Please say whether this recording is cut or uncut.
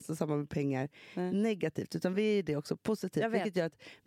uncut